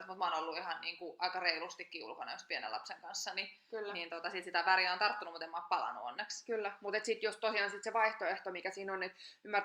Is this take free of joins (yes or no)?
yes